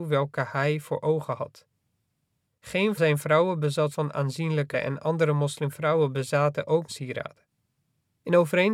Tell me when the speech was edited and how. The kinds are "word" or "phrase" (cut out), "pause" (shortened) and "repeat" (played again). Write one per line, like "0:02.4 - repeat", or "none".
0:03.0 - word
0:03.9 - word
0:04.7 - word
0:06.9 - phrase

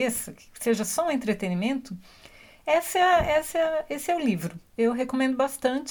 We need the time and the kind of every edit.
none

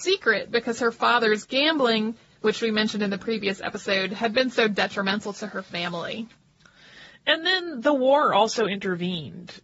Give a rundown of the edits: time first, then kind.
none

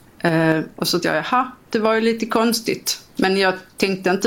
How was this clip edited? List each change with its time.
0:01.0 - word
0:03.1 - pause

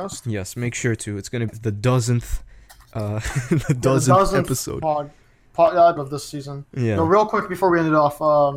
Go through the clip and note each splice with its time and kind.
0:01.5 - word
0:06.0 - word

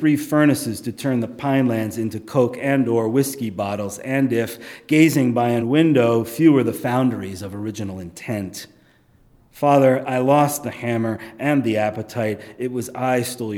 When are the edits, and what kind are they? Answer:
0:05.6 - word

